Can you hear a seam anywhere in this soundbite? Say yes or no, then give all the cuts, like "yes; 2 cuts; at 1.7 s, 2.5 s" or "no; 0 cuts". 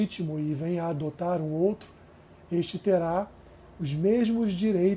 no; 0 cuts